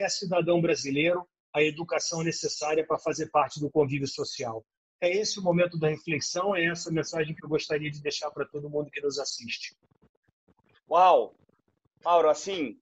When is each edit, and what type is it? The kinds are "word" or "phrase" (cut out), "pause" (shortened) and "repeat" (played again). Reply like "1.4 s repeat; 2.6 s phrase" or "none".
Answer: none